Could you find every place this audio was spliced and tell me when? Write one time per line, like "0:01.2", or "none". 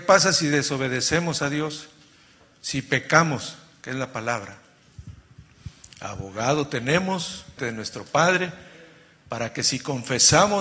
0:07.6